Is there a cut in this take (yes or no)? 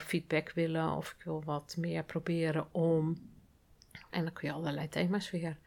no